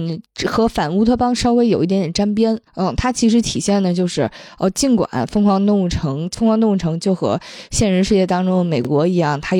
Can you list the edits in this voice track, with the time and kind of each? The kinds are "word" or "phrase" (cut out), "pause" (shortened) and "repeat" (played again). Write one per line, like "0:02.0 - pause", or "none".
0:02.7 - pause